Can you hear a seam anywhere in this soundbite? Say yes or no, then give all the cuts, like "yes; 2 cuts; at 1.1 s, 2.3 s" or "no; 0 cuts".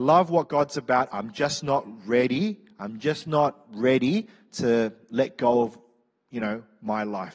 no; 0 cuts